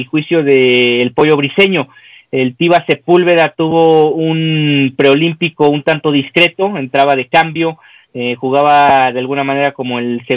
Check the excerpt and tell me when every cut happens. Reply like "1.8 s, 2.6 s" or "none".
none